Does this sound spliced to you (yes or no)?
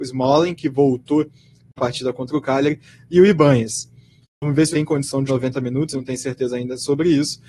yes